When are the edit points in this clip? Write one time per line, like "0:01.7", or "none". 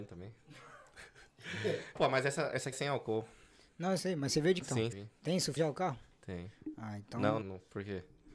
0:02.0
0:02.7
0:04.0
0:04.6
0:04.9
0:05.6
0:07.4

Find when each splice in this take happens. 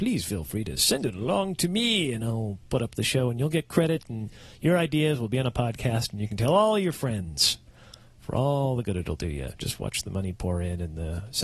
none

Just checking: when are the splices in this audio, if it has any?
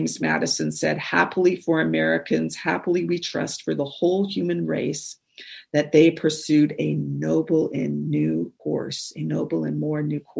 0:08.6

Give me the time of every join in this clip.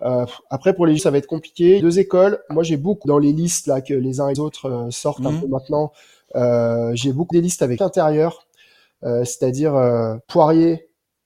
0:01.0
0:01.8
0:03.0
0:04.3
0:07.3
0:07.8
0:10.2

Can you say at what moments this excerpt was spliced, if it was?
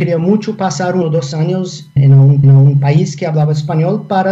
0:01.0
0:02.0
0:02.4

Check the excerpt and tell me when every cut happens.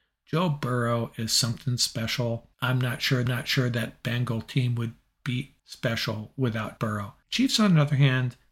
0:02.5
0:03.3
0:05.6
0:06.8
0:07.2

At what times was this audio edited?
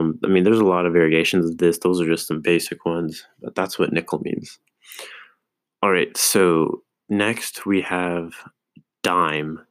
none

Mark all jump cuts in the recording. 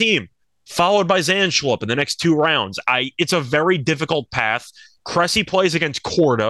none

